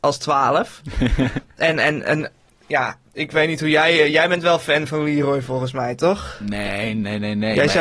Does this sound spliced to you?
no; 0 cuts

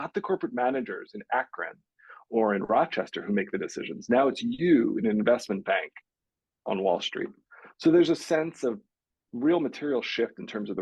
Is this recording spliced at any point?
no; 0 cuts

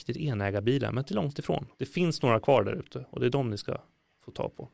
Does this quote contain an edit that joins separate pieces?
yes; 1 cut; at 1.7 s

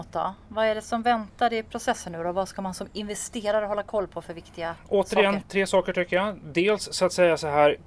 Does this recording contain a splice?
no; 0 cuts

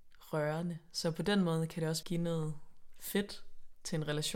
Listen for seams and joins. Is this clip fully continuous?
no; 1 cut; at 2.0 s

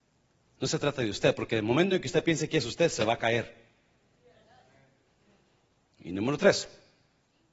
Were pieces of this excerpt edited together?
no; 0 cuts

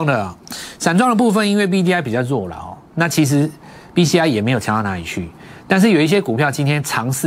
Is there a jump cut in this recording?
no; 0 cuts

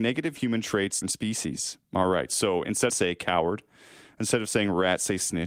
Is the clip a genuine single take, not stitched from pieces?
no; 3 cuts; at 1.0 s, 1.8 s, 2.9 s

